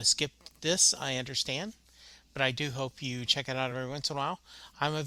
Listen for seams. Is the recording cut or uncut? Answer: uncut